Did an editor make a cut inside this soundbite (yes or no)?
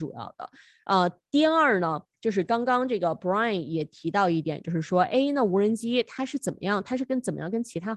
no